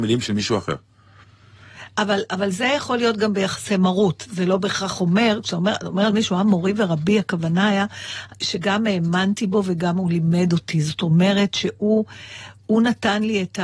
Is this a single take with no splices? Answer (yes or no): yes